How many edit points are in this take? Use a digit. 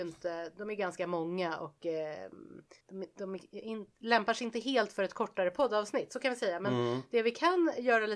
1